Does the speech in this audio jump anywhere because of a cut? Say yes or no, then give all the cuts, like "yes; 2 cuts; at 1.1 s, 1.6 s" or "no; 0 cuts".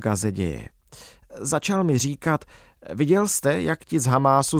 no; 0 cuts